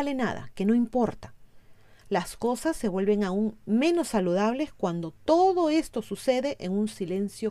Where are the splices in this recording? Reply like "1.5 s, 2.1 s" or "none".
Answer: none